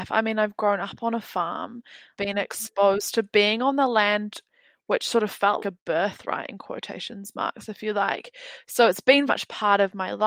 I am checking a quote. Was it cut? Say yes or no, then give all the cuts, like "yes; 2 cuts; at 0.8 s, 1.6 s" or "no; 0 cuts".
yes; 3 cuts; at 2.1 s, 5.6 s, 9.3 s